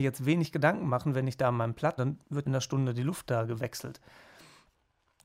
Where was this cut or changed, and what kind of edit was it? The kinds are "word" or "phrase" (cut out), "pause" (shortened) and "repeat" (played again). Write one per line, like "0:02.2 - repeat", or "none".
0:02.0 - phrase
0:02.5 - phrase